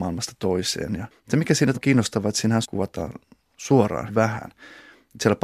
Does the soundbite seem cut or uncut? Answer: cut